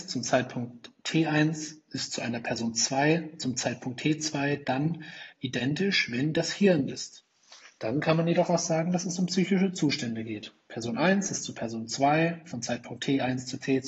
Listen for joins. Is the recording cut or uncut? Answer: cut